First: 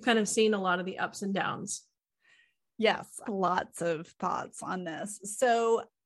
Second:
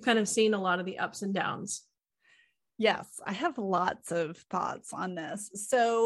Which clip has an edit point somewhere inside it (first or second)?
first